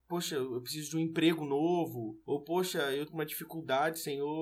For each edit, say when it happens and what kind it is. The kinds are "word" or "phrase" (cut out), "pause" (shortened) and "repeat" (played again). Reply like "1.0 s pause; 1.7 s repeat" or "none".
2.2 s pause; 3.1 s phrase